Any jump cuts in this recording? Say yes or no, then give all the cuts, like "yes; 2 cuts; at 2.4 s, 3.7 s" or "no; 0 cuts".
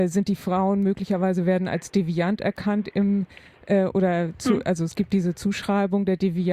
no; 0 cuts